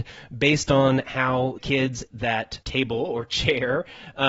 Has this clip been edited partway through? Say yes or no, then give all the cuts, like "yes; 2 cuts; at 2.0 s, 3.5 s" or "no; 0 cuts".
yes; 3 cuts; at 1.6 s, 2.1 s, 2.6 s